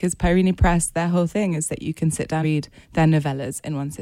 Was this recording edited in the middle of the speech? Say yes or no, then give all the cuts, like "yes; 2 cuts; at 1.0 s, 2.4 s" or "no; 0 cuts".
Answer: yes; 2 cuts; at 2.4 s, 2.8 s